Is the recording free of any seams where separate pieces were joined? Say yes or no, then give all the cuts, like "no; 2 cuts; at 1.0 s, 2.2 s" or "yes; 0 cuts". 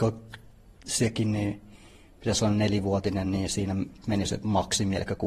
yes; 0 cuts